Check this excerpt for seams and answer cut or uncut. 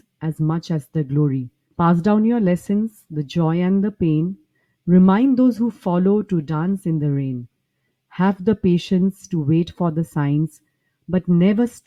uncut